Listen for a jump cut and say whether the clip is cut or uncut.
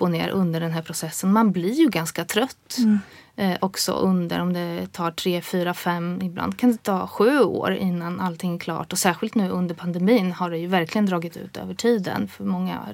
uncut